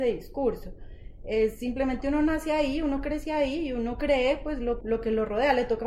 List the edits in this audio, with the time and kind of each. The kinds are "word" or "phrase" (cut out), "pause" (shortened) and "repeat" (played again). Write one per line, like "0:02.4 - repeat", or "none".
0:04.8 - word